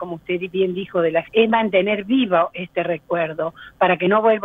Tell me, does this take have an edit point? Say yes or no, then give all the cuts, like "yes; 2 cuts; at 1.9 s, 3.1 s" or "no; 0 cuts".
yes; 1 cut; at 1.3 s